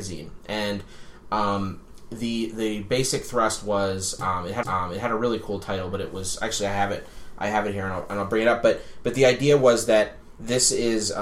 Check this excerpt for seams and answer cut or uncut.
cut